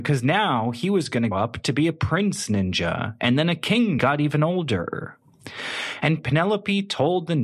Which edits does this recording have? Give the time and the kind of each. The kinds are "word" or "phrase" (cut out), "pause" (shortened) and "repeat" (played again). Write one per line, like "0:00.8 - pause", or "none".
0:01.3 - word
0:04.0 - phrase